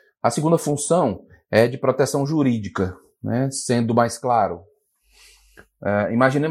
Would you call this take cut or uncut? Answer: uncut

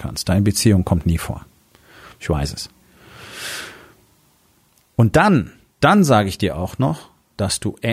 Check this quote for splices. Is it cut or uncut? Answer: uncut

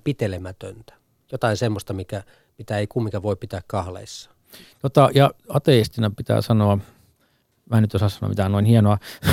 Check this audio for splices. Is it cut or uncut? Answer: uncut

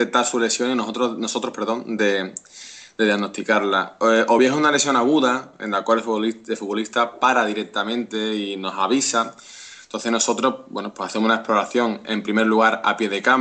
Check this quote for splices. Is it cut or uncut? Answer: uncut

